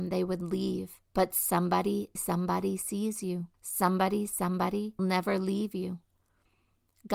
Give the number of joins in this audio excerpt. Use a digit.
4